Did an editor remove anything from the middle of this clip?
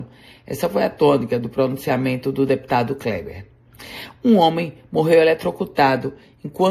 no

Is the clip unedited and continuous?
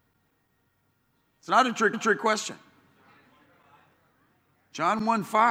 no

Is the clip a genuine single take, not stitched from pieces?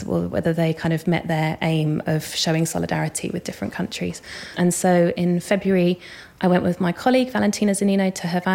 yes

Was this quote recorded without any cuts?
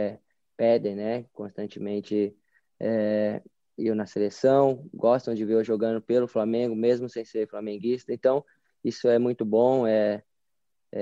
yes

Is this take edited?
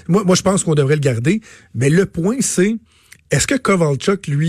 no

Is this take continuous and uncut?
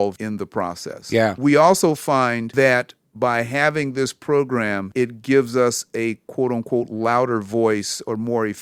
yes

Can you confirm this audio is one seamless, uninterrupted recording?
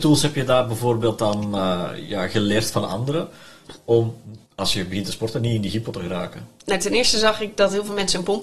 no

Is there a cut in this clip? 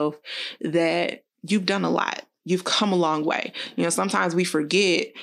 yes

